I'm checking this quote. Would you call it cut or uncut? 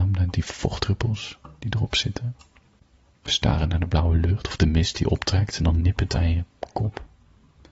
uncut